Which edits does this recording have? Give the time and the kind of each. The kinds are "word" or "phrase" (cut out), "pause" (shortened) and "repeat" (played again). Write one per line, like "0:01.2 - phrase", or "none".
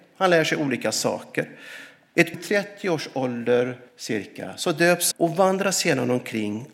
0:02.3 - phrase
0:03.9 - pause
0:05.1 - phrase